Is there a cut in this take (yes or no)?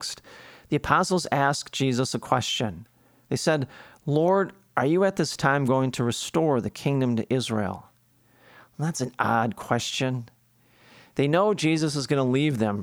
no